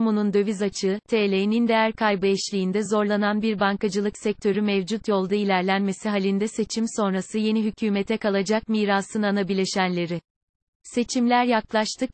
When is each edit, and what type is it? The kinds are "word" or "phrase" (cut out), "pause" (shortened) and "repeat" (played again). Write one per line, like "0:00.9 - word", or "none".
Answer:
none